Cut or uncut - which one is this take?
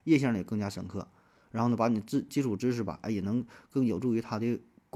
uncut